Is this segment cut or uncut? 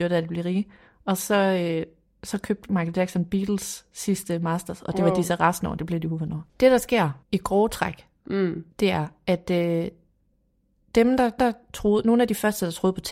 cut